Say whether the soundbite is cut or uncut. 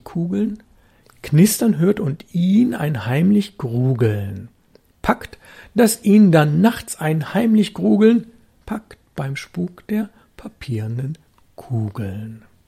uncut